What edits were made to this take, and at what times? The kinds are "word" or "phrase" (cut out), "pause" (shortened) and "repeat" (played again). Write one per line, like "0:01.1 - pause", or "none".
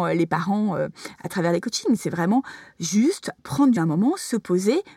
0:03.4 - pause
0:03.8 - word